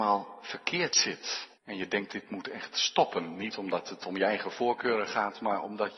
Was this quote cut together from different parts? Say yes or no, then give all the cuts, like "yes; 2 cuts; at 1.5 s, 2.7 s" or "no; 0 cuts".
yes; 1 cut; at 1.6 s